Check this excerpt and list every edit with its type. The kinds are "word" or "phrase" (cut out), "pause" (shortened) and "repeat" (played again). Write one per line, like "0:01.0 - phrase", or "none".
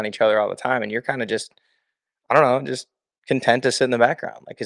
none